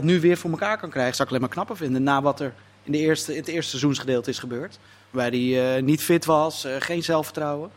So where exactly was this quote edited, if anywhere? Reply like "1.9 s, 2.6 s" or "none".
none